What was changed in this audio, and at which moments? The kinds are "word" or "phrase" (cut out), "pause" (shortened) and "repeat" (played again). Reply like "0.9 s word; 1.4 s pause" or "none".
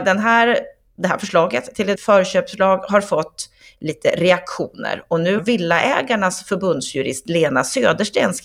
2.0 s word; 5.4 s word